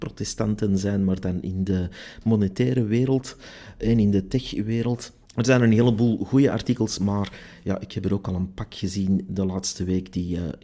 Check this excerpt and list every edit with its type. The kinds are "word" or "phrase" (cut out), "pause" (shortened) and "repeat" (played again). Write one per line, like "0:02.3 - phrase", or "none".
0:05.3 - pause